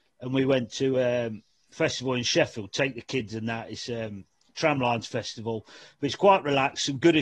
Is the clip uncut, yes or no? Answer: yes